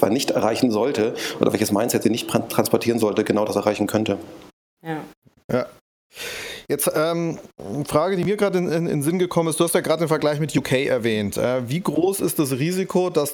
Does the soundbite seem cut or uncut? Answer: cut